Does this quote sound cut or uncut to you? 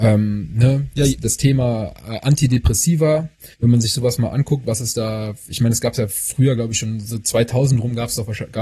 cut